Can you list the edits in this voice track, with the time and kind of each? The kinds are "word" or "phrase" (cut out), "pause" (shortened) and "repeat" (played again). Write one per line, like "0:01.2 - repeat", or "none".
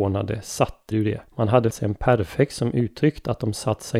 0:00.9 - phrase
0:01.3 - pause
0:01.7 - word